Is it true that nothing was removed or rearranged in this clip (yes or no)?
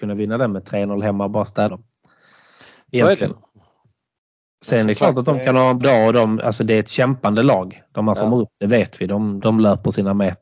no